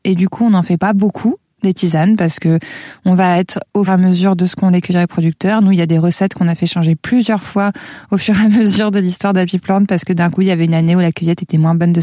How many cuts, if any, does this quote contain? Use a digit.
1